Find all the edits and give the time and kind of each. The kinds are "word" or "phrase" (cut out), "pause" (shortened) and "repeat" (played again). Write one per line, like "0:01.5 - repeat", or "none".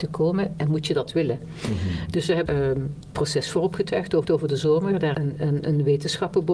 0:02.5 - phrase
0:03.1 - word
0:04.2 - repeat
0:05.1 - word